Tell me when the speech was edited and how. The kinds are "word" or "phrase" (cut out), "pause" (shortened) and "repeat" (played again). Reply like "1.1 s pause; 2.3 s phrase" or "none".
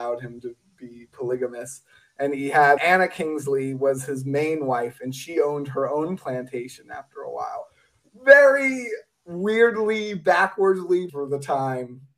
2.8 s word; 11.1 s word